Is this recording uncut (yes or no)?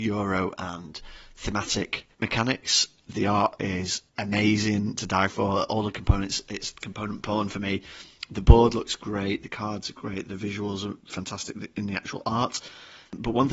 no